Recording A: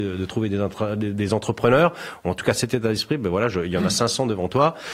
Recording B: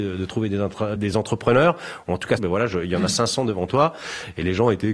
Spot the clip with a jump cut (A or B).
B